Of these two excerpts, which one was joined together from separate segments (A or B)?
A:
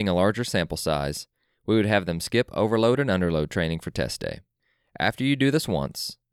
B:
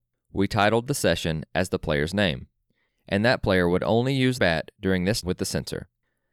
B